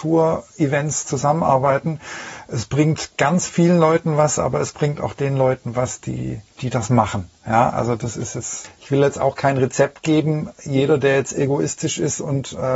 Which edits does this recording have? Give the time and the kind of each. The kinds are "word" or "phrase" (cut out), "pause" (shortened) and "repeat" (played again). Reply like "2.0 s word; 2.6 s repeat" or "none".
6.5 s pause